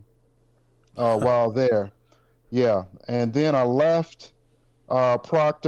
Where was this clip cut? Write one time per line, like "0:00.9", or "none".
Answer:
none